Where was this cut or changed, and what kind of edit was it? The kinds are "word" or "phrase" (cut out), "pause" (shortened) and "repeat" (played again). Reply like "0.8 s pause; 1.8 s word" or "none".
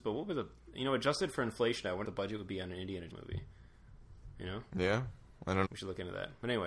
2.0 s word; 3.1 s word; 5.6 s word